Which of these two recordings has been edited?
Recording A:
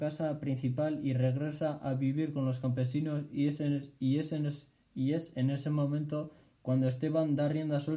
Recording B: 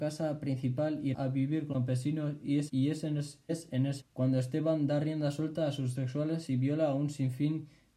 B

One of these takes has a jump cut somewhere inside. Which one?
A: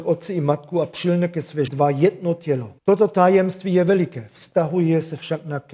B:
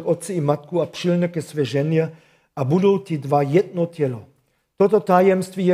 A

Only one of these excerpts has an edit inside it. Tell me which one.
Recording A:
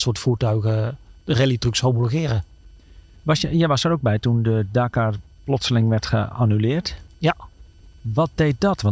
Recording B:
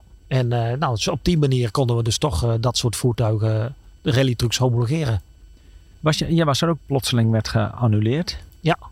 B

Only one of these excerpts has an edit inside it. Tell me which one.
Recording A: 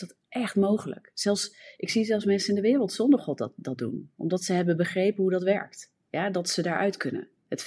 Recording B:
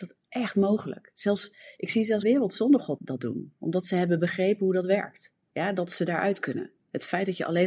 B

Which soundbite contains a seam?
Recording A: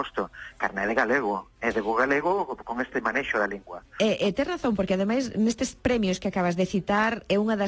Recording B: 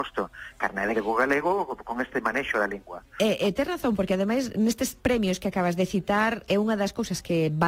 B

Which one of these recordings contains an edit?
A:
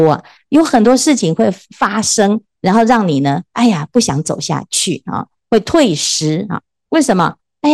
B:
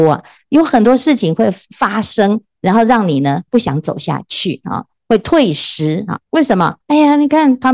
B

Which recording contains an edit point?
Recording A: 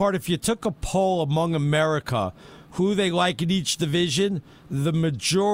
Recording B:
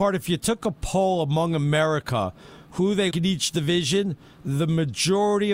B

